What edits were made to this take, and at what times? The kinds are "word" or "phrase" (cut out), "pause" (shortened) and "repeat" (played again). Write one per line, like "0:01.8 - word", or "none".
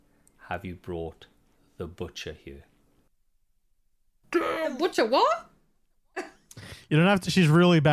none